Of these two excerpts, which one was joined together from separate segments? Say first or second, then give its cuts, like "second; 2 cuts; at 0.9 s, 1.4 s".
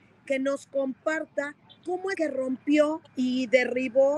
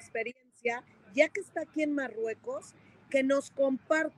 first; 2 cuts; at 2.1 s, 3.1 s